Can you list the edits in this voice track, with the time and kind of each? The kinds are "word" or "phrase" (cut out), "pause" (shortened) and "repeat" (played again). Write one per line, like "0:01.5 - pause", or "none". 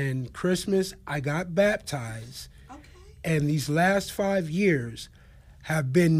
none

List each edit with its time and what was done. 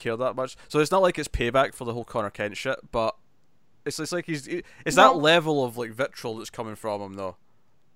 none

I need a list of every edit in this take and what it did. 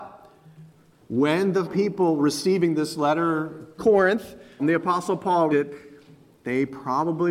0:01.6 - word
0:03.8 - word
0:04.6 - word
0:05.5 - word

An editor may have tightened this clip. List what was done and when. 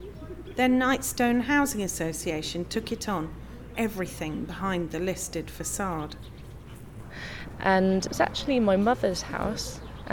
0:03.7 - phrase

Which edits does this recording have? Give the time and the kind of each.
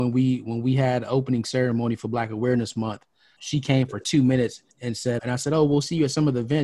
0:03.4 - word
0:04.7 - pause
0:05.2 - word

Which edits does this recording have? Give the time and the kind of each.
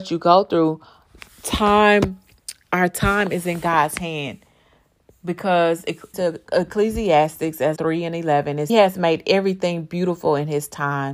0:06.1 - word
0:07.8 - phrase
0:08.7 - phrase

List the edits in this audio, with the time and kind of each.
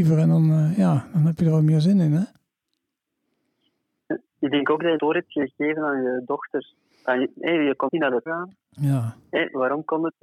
0:05.0 - word
0:07.9 - word
0:08.3 - word

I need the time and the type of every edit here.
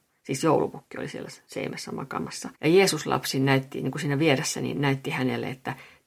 0:02.5 - pause

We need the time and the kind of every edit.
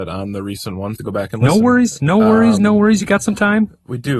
0:01.0 - phrase

